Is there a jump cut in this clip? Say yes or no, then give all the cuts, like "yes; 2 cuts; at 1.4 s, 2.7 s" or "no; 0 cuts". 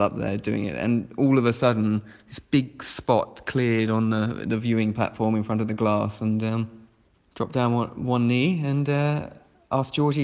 no; 0 cuts